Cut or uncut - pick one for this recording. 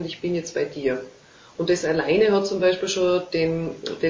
uncut